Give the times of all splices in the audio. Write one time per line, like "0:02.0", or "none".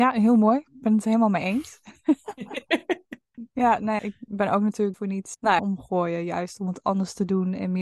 0:04.0
0:04.9
0:05.6